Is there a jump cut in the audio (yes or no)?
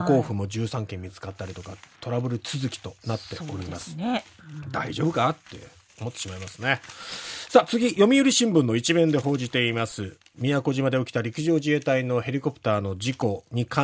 no